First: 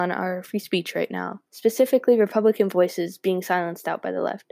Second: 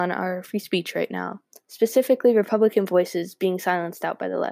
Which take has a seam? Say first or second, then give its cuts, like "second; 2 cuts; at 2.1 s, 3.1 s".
first; 1 cut; at 1.5 s